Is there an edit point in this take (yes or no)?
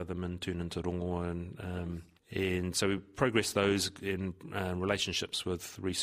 no